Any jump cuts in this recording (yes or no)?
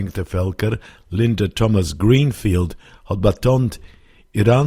no